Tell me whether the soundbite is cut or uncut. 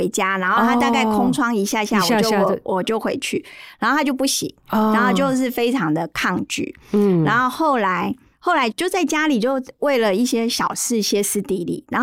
uncut